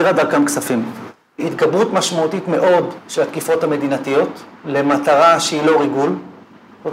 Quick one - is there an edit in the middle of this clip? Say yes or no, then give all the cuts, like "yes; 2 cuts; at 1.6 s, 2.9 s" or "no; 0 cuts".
no; 0 cuts